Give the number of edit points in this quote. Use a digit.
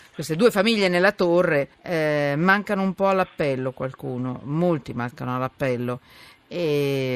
1